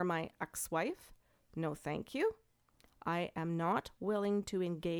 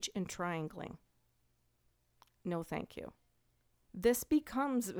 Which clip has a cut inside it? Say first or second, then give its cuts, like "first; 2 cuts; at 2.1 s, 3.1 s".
second; 1 cut; at 1.4 s